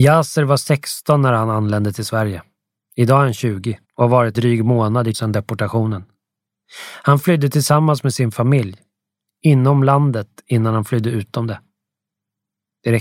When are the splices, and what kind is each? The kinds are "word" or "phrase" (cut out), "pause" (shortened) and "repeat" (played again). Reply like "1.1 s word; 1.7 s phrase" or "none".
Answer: 2.8 s pause; 3.8 s pause; 4.3 s word; 5.1 s word